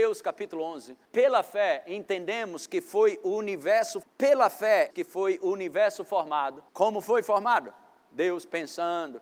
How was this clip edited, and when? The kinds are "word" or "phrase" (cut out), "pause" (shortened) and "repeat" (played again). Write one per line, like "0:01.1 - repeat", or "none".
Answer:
0:01.0 - pause
0:04.0 - word
0:04.9 - word
0:06.7 - pause